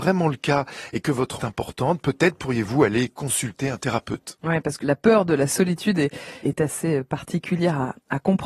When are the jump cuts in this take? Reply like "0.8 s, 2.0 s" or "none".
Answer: 1.4 s, 4.8 s, 6.4 s